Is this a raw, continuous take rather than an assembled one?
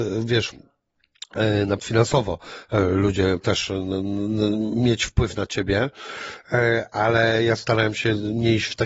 no; 2 cuts; at 1.8 s, 3.4 s

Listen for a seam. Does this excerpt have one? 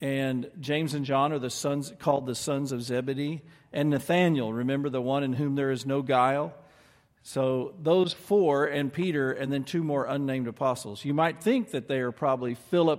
no; 0 cuts

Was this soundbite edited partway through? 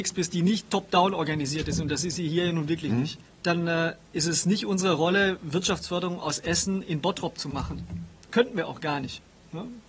yes; 1 cut; at 3.2 s

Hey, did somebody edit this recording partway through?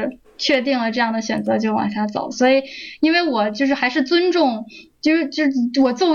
no; 0 cuts

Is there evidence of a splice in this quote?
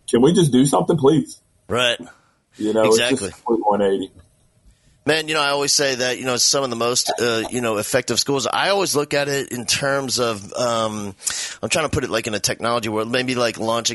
no; 0 cuts

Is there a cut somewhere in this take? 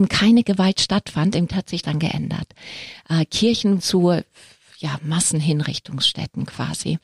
yes; 3 cuts; at 1.5 s, 1.8 s, 3.8 s

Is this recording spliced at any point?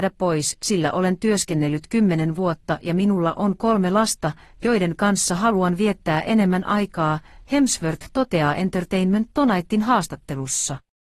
no; 0 cuts

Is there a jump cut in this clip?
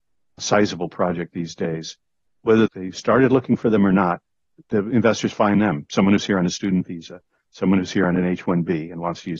no; 0 cuts

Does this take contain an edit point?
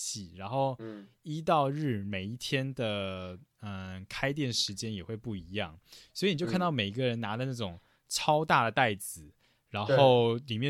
no; 0 cuts

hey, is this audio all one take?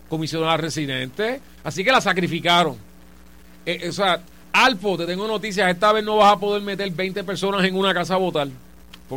yes; 0 cuts

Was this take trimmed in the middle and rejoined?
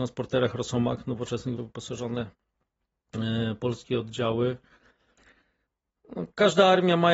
yes; 1 cut; at 1.6 s

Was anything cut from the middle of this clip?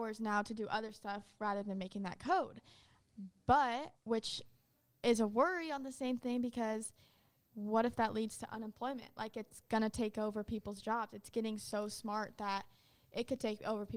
yes; 1 cut; at 4.0 s

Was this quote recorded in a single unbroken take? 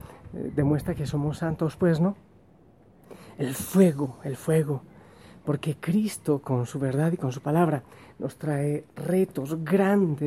yes; 0 cuts

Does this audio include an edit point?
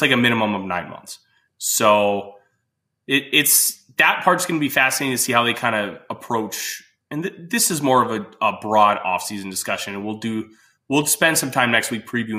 no; 0 cuts

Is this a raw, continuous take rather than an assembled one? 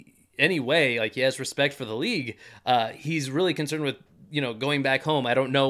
yes; 0 cuts

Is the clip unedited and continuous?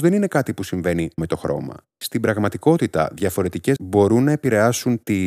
no; 3 cuts; at 1.2 s, 1.9 s, 3.8 s

